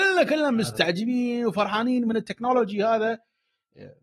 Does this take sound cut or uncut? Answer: uncut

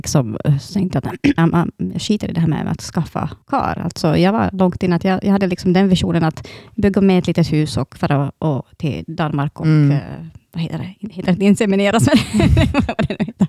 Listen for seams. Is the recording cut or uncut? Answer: cut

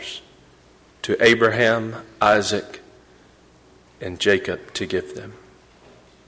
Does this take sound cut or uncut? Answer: uncut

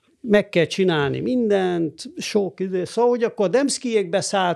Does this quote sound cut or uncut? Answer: uncut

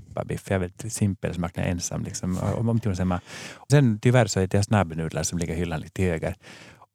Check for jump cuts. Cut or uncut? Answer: cut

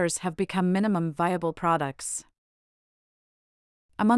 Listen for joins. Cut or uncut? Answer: uncut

